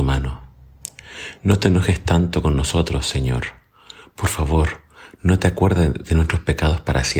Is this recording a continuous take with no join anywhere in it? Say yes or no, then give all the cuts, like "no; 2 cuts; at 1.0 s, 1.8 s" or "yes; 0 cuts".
yes; 0 cuts